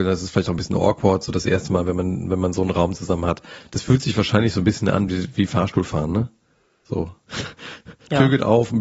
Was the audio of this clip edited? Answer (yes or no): no